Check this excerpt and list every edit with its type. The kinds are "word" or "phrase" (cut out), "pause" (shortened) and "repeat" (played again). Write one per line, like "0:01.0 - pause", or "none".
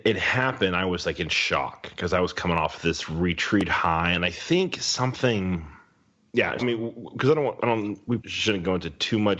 0:06.6 - word
0:07.6 - word
0:08.2 - word